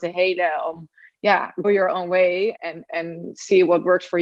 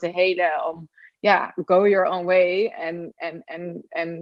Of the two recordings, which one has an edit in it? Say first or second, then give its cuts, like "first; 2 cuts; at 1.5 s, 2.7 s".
first; 3 cuts; at 1.6 s, 2.6 s, 2.9 s